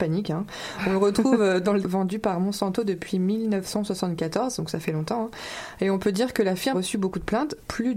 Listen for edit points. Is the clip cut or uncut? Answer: cut